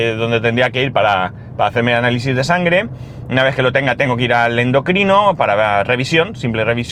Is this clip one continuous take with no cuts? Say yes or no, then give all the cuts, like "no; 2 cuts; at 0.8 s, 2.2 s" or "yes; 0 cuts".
yes; 0 cuts